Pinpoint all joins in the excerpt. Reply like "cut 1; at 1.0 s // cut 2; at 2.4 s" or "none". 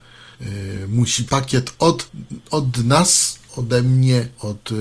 cut 1; at 1.3 s

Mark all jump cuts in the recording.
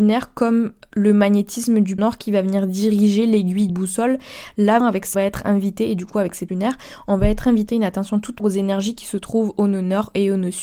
cut 1; at 2.0 s // cut 2; at 3.7 s // cut 3; at 4.8 s // cut 4; at 5.1 s // cut 5; at 6.5 s // cut 6; at 7.7 s // cut 7; at 8.4 s

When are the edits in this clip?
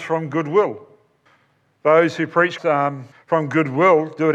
cut 1; at 1.3 s // cut 2; at 2.6 s // cut 3; at 3.1 s

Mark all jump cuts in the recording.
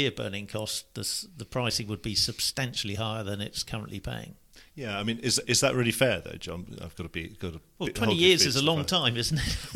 cut 1; at 4.7 s

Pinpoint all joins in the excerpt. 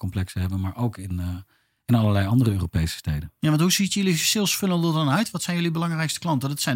none

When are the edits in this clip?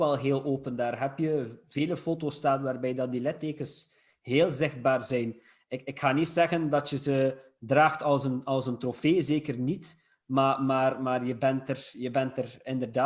none

